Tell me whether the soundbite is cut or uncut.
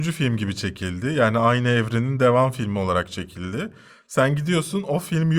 uncut